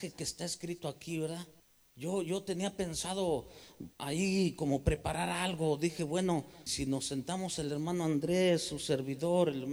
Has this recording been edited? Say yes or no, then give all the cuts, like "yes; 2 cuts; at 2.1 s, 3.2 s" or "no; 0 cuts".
yes; 3 cuts; at 1.6 s, 3.9 s, 6.7 s